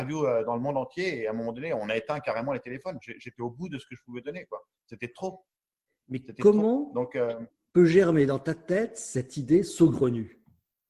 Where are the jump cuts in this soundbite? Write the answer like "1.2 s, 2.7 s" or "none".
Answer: none